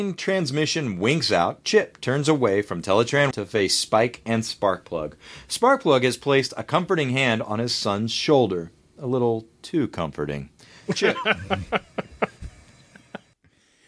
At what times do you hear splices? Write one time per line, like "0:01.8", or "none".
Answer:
0:03.3